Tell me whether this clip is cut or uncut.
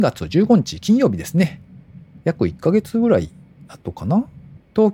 uncut